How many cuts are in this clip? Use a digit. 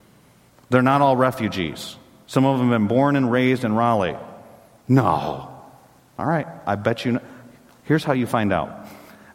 0